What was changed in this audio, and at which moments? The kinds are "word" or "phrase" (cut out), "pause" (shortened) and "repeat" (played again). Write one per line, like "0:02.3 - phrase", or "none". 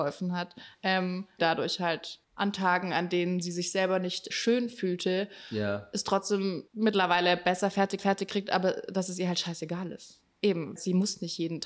0:01.4 - phrase
0:02.2 - pause
0:04.3 - word
0:06.7 - pause
0:08.0 - repeat
0:10.8 - word